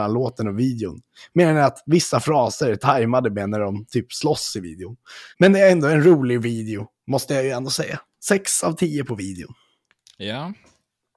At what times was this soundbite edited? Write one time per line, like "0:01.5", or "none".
0:05.3
0:07.0